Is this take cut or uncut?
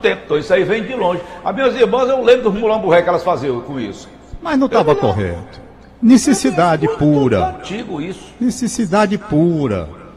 uncut